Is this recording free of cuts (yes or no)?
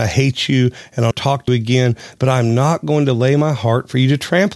no